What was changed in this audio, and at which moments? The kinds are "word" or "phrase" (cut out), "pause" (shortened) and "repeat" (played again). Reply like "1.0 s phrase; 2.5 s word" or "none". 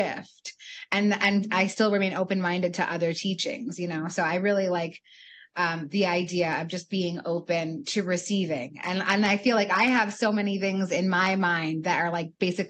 none

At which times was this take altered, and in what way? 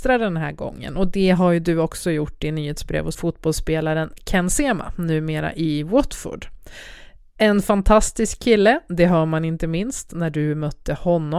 3.1 s phrase

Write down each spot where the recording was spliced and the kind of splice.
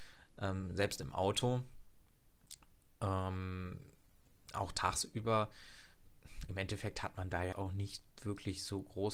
7.5 s word

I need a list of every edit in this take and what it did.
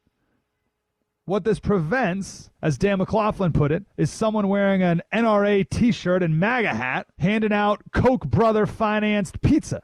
2.5 s pause; 3.9 s pause; 7.1 s pause

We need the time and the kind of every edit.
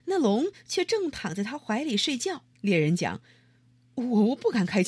2.5 s pause

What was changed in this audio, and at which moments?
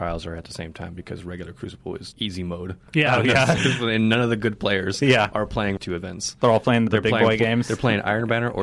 2.1 s word; 3.6 s phrase; 5.8 s phrase; 6.9 s word

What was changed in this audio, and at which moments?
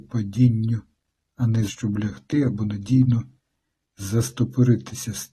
1.7 s phrase

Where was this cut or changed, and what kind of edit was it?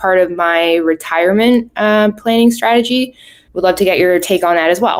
none

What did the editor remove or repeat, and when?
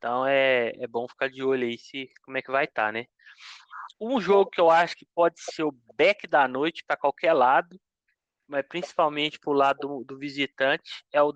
3.9 s pause

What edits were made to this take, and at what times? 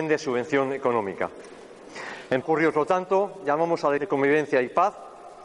2.4 s word; 4.0 s word

